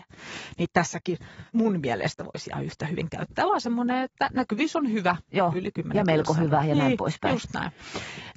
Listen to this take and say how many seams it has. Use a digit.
1